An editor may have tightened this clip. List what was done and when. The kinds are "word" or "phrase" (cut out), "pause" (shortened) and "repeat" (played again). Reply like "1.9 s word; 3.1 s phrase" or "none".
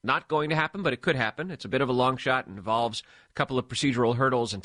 none